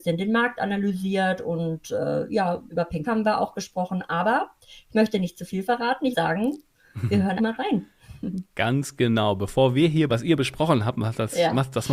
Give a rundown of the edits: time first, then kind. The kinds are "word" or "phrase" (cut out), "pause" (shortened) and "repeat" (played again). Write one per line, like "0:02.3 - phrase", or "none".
0:02.7 - word
0:03.0 - word
0:06.1 - word
0:07.4 - word
0:10.1 - word